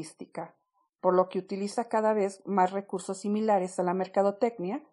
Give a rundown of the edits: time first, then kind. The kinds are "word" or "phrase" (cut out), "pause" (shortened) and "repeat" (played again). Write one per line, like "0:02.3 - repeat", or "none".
none